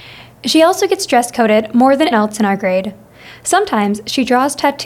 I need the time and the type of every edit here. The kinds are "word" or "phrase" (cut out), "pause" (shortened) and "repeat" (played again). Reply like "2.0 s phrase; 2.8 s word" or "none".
2.1 s word